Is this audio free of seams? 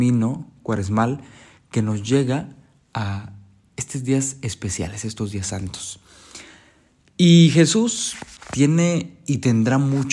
yes; 0 cuts

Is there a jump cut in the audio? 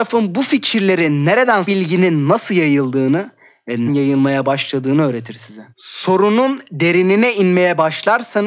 yes; 3 cuts; at 1.6 s, 3.9 s, 5.7 s

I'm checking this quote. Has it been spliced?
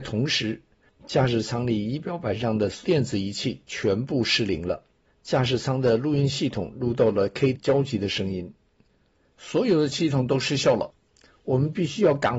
yes; 1 cut; at 7.5 s

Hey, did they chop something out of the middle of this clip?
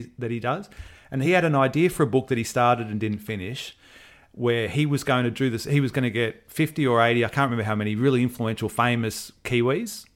no; 0 cuts

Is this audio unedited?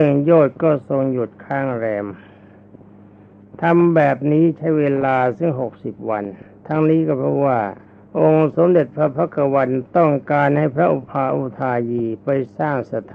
no; 1 cut; at 7.9 s

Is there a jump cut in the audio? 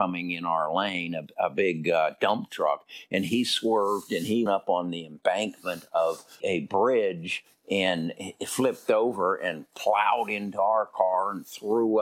yes; 2 cuts; at 4.5 s, 6.4 s

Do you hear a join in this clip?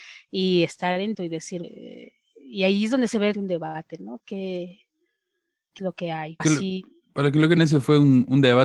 yes; 6 cuts; at 1.1 s, 1.6 s, 3.3 s, 5.8 s, 6.4 s, 7.6 s

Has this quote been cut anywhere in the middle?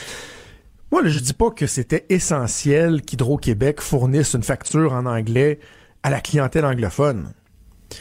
no; 0 cuts

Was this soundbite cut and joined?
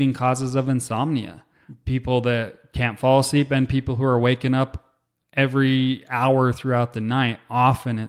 no; 0 cuts

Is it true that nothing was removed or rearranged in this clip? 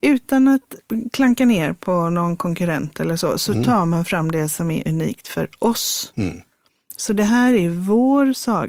yes; 0 cuts

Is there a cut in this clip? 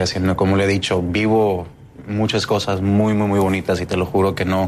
no; 0 cuts

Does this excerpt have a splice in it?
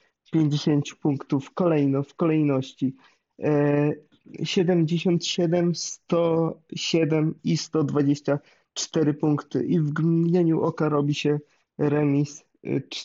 no; 0 cuts

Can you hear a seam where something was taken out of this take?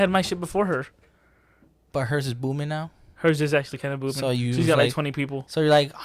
no; 0 cuts

